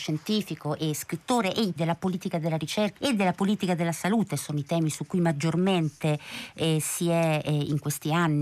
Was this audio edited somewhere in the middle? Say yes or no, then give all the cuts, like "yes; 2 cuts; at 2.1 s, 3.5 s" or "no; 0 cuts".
yes; 2 cuts; at 1.8 s, 2.9 s